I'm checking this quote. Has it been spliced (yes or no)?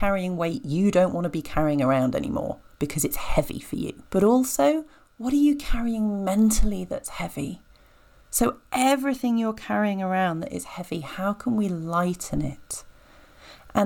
yes